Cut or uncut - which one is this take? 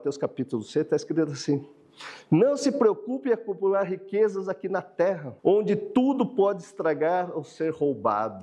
cut